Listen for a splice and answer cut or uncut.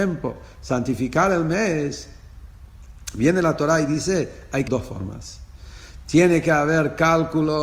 cut